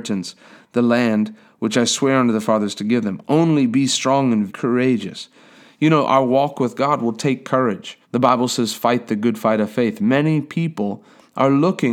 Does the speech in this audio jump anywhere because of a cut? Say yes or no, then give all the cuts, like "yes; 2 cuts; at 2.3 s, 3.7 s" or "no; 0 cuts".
yes; 2 cuts; at 4.5 s, 8.0 s